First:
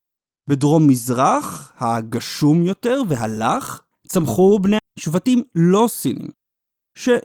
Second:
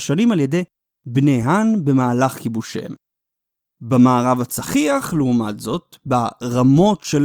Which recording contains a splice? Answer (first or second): first